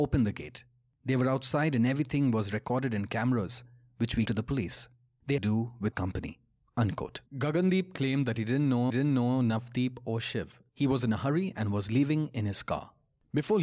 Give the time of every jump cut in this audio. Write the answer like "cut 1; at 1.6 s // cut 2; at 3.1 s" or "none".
cut 1; at 4.3 s // cut 2; at 5.4 s // cut 3; at 5.9 s // cut 4; at 7.3 s // cut 5; at 8.9 s // cut 6; at 10.7 s